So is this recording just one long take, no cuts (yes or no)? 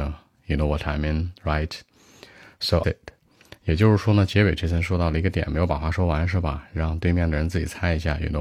no